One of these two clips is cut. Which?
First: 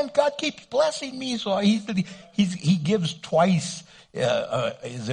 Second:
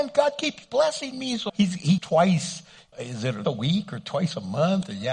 second; 4 cuts; at 1.5 s, 2.0 s, 2.9 s, 3.4 s

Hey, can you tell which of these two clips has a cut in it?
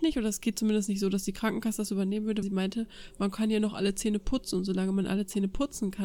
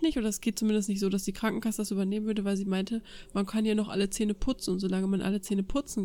first; 1 cut; at 2.4 s

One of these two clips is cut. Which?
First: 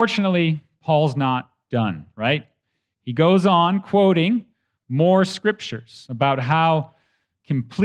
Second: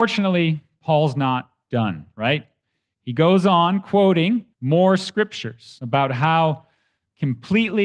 second; 1 cut; at 4.5 s

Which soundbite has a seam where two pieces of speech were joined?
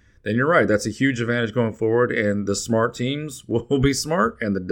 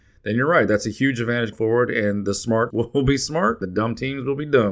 second; 3 cuts; at 1.5 s, 2.7 s, 3.6 s

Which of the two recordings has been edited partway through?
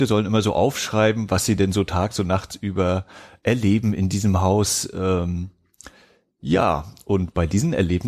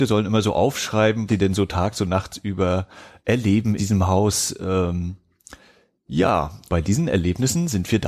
second; 3 cuts; at 1.3 s, 3.8 s, 6.7 s

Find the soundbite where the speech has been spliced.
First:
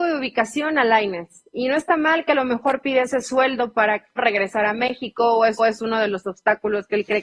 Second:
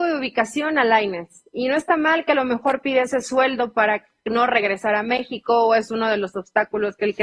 first; 2 cuts; at 4.2 s, 5.6 s

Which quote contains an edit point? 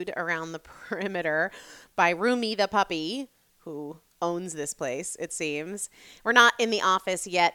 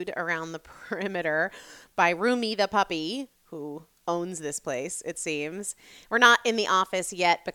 second; 1 cut; at 3.3 s

